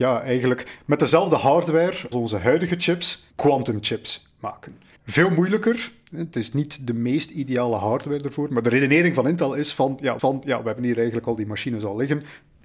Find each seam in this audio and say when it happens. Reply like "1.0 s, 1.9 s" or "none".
2.1 s, 3.3 s, 5.0 s, 6.5 s, 10.2 s